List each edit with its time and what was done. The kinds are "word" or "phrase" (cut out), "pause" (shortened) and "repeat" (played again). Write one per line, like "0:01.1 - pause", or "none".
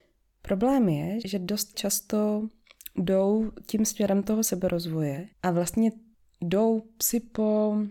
0:01.2 - word
0:01.7 - word
0:05.3 - pause
0:06.1 - pause